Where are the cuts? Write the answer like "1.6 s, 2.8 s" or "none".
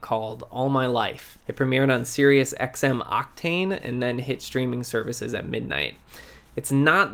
1.4 s

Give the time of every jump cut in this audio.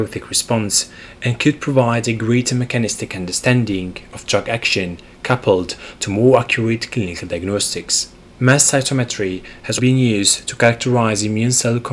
8.3 s, 9.8 s

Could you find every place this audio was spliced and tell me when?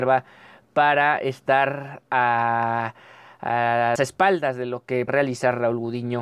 4.0 s, 5.1 s

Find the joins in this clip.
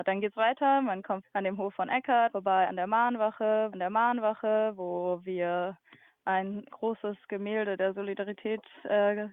1.2 s, 2.3 s, 3.7 s, 6.7 s

